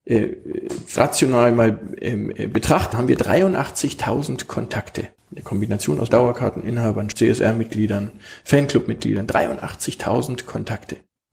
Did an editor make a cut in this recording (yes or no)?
yes